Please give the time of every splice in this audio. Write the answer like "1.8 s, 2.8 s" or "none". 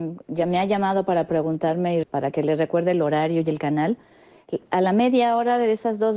2.0 s